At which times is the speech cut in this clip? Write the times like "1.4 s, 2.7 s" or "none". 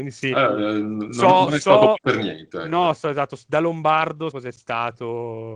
2.0 s, 4.3 s